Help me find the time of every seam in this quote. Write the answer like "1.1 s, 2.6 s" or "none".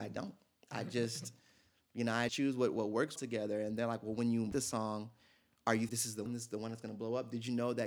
2.3 s, 3.2 s, 4.5 s, 5.9 s, 6.3 s